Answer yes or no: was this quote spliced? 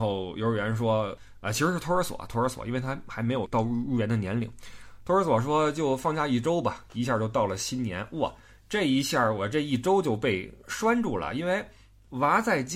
no